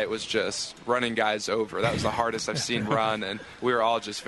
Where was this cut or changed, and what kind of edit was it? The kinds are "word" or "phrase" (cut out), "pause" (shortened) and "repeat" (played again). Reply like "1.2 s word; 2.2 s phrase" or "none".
2.8 s word